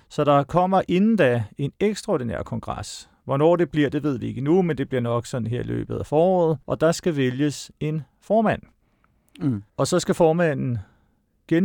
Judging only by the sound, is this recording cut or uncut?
cut